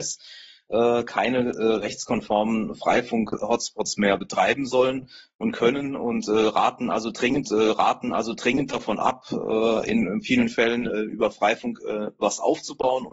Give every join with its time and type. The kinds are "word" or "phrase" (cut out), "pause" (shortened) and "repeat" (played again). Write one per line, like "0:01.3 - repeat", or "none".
0:07.4 - repeat